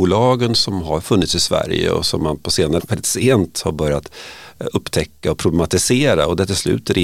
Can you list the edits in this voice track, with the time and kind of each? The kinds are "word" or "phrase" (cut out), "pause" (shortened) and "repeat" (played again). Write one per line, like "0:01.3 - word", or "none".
0:02.8 - word